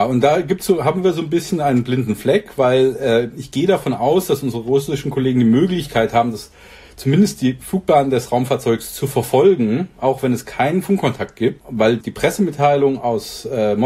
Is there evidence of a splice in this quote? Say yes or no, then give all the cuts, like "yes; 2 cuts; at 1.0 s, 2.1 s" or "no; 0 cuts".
no; 0 cuts